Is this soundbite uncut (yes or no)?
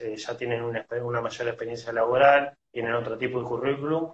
yes